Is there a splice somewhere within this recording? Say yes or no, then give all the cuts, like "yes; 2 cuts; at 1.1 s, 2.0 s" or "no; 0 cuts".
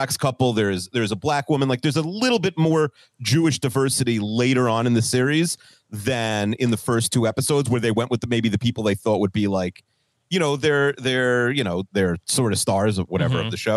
no; 0 cuts